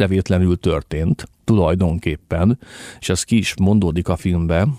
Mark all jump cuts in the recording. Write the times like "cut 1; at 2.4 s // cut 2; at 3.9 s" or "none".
cut 1; at 1.3 s